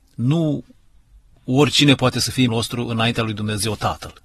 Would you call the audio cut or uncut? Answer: cut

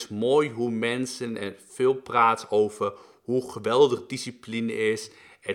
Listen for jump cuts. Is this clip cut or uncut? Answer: uncut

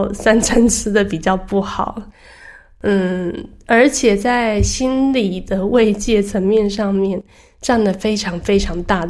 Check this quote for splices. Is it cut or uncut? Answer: uncut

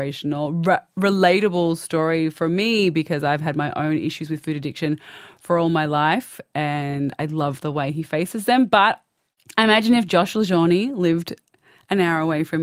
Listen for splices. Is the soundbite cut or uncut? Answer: uncut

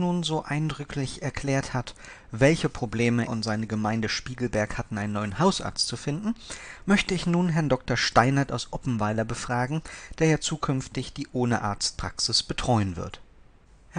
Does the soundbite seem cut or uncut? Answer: cut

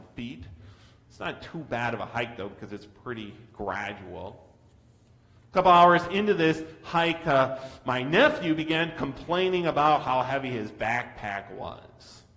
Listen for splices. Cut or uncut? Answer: uncut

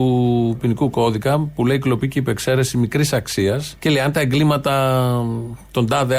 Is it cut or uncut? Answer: cut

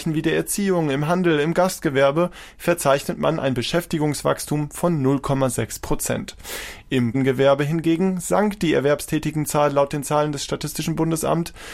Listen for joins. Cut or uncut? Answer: cut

